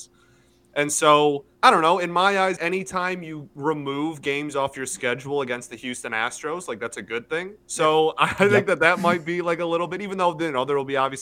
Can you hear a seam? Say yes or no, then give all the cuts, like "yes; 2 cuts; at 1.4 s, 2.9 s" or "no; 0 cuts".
yes; 2 cuts; at 1.5 s, 2.6 s